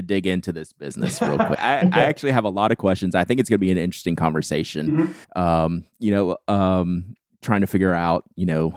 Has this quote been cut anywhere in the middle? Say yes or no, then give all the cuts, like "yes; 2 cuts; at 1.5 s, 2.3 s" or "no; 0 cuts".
yes; 2 cuts; at 1.5 s, 5.2 s